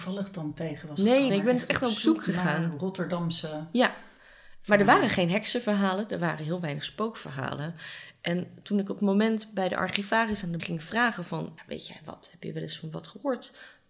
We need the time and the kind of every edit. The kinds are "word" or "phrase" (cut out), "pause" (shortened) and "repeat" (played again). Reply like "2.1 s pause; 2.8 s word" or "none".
1.3 s word; 10.6 s word; 11.6 s word

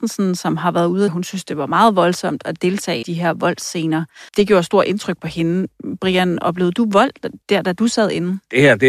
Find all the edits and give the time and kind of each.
1.1 s phrase; 3.0 s phrase; 4.3 s pause; 7.4 s pause

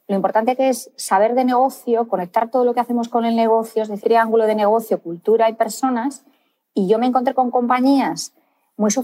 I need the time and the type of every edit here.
4.0 s phrase

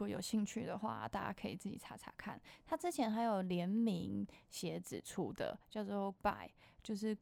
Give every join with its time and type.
6.2 s word

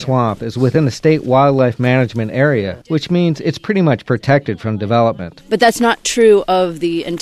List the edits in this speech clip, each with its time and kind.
2.8 s pause

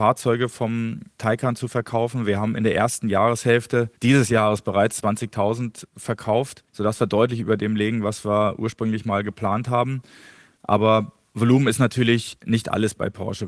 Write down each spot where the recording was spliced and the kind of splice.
4.0 s pause; 6.7 s pause

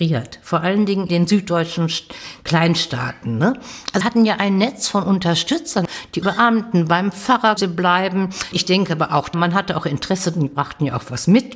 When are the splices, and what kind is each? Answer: 1.1 s word; 4.0 s word; 6.2 s word; 7.6 s word; 8.5 s word; 9.3 s word

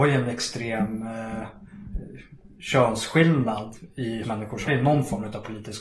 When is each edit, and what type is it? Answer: 4.2 s word; 4.7 s word

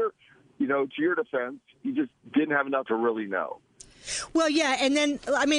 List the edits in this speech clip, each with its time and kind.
2.9 s word

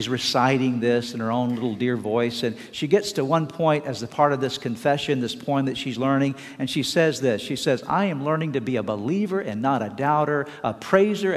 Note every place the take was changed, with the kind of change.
none

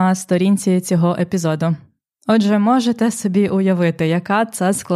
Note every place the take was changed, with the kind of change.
none

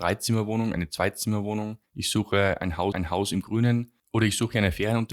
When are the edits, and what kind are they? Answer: 1.9 s pause; 2.9 s repeat; 4.0 s pause

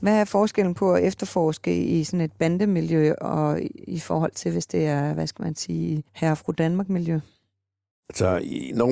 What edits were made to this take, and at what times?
6.1 s pause

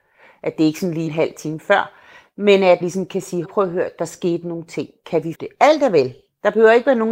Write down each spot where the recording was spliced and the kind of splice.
1.1 s word; 2.8 s word; 3.4 s word; 5.3 s word

